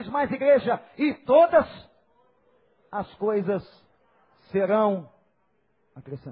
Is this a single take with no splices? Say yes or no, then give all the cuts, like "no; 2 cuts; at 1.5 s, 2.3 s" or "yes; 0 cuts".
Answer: yes; 0 cuts